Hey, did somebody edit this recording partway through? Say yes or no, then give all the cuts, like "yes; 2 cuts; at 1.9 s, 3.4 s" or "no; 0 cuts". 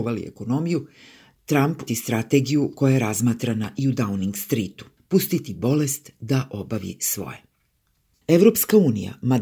yes; 1 cut; at 1.9 s